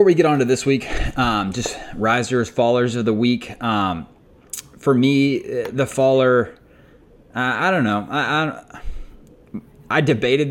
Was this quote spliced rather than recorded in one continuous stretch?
no; 0 cuts

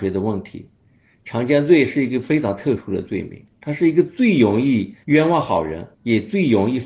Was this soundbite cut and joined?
yes; 2 cuts; at 5.0 s, 5.9 s

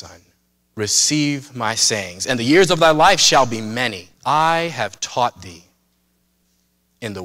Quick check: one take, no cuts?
no; 1 cut; at 4.1 s

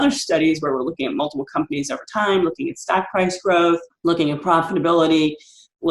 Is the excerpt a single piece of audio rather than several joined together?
yes; 0 cuts

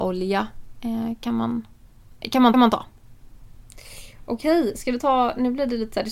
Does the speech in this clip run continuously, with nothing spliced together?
no; 1 cut; at 2.5 s

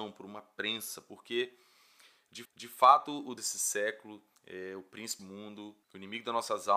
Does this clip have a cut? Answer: yes; 5 cuts; at 2.4 s, 3.4 s, 4.3 s, 5.2 s, 5.8 s

